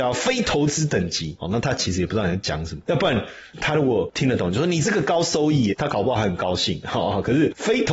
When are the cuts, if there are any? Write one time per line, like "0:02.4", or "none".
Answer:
0:05.7